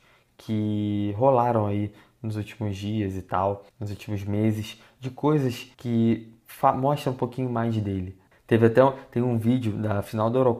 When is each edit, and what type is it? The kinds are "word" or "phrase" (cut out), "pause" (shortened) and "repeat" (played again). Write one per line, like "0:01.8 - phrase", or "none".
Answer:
0:03.7 - pause
0:05.7 - pause
0:08.3 - pause